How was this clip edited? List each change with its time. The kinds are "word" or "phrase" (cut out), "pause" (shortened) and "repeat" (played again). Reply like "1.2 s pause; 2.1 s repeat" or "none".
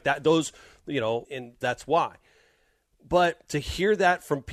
1.2 s word; 1.6 s phrase